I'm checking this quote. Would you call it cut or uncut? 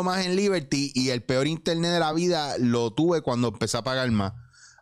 uncut